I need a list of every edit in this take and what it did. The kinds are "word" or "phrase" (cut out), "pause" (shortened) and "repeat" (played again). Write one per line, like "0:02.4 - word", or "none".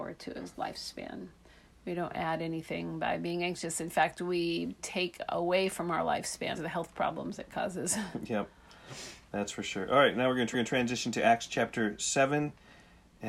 0:01.5 - pause
0:04.8 - word
0:06.6 - phrase
0:10.5 - repeat

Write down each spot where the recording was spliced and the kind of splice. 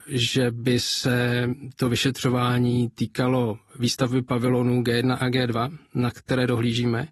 none

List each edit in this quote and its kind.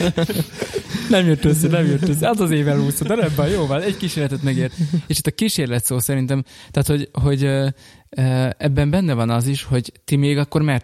none

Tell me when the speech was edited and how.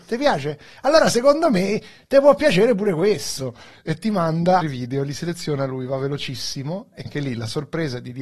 0:04.6 - word
0:07.1 - word

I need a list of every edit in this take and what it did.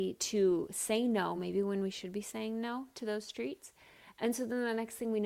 none

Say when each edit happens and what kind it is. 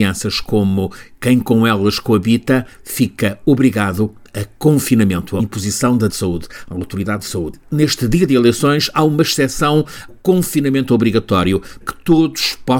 0:05.4 - word
0:06.1 - word
0:07.2 - word
0:10.1 - word
0:11.8 - word

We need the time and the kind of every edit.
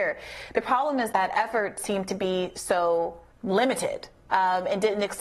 0:01.1 - word
0:03.3 - pause

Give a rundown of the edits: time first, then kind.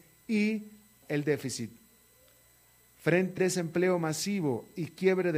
0:01.0 - word
0:03.4 - word

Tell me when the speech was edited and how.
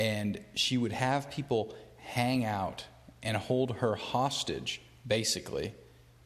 none

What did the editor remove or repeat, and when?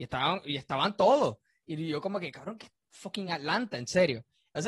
none

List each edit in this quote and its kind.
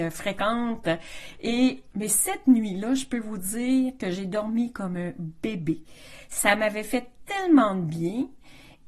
0:01.9 - word

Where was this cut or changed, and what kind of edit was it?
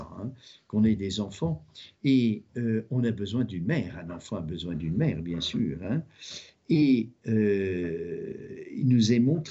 none

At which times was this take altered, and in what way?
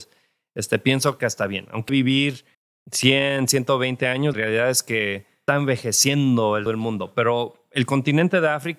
0:01.2 - phrase
0:01.9 - phrase
0:02.5 - pause
0:04.3 - word
0:05.5 - phrase
0:06.7 - word

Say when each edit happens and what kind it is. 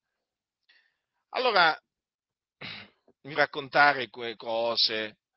0:03.4 - word
0:04.4 - word

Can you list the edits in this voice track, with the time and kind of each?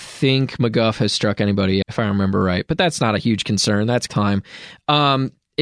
0:01.8 - word
0:04.1 - phrase

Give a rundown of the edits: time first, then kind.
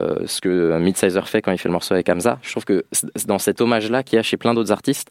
none

